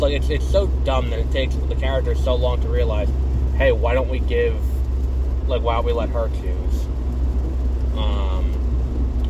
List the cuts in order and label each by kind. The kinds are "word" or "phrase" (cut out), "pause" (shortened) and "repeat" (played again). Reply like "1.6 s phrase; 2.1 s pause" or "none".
none